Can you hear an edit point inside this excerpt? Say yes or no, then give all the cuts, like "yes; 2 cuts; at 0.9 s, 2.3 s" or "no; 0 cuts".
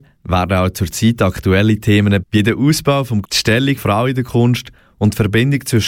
yes; 3 cuts; at 2.2 s, 3.2 s, 3.8 s